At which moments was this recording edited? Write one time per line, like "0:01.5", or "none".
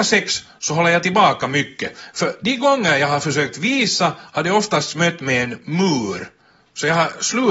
none